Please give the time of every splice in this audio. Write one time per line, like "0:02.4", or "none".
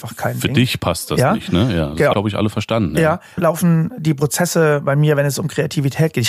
0:02.1
0:03.4